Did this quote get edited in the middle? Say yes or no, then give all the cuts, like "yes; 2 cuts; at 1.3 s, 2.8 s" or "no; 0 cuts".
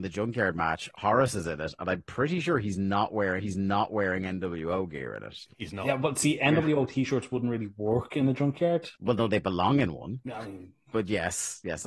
yes; 3 cuts; at 3.4 s, 9.0 s, 10.2 s